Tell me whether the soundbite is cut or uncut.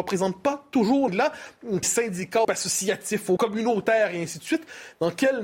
cut